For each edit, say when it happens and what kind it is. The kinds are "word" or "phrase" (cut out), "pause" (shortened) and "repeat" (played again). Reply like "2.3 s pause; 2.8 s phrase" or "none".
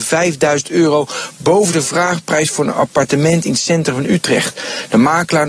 none